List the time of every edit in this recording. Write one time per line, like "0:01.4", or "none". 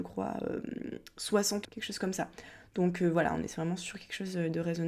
0:01.6